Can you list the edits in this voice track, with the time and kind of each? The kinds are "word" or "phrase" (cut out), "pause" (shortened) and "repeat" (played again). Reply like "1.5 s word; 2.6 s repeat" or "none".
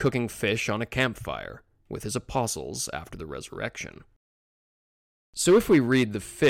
none